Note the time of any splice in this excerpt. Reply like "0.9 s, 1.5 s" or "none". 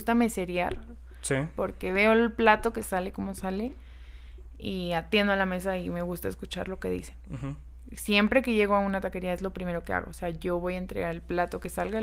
none